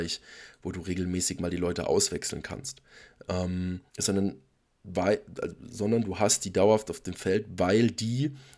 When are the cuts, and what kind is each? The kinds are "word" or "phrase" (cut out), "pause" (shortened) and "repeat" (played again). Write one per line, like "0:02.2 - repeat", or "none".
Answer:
0:03.9 - pause